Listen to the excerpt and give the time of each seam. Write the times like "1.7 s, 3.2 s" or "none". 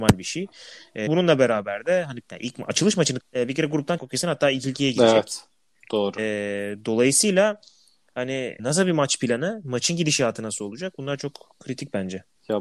1.1 s, 2.2 s, 3.2 s, 4.0 s, 8.6 s